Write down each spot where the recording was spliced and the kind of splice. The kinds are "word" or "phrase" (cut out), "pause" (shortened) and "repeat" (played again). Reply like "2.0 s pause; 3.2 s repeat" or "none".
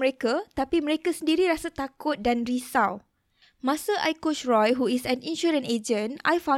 none